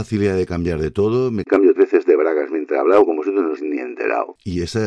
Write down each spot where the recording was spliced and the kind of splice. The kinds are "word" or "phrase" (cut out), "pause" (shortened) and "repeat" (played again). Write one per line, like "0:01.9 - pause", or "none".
0:01.8 - word
0:03.6 - word